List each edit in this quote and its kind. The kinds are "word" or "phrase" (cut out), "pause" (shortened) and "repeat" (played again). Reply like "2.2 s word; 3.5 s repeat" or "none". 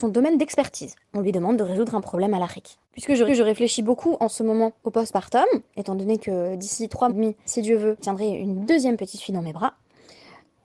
2.8 s pause; 3.3 s repeat; 4.8 s pause; 5.7 s pause; 7.1 s word; 7.5 s word; 8.0 s word